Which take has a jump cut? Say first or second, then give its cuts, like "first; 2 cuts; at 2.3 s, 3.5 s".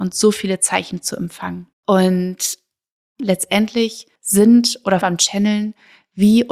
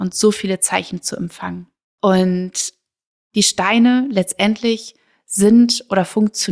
first; 4 cuts; at 1.7 s, 3.2 s, 4.2 s, 5.0 s